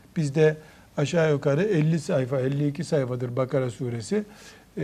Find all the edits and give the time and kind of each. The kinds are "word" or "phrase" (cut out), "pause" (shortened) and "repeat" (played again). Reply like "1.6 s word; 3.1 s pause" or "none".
none